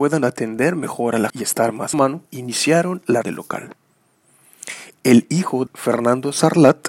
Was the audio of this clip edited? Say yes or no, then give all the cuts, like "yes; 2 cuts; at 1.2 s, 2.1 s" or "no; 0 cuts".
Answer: yes; 5 cuts; at 1.3 s, 1.9 s, 2.3 s, 3.2 s, 5.7 s